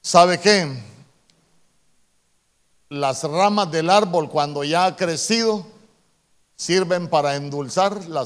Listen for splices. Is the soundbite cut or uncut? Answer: uncut